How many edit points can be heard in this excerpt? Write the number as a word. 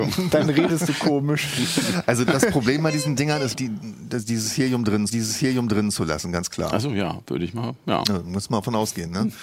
three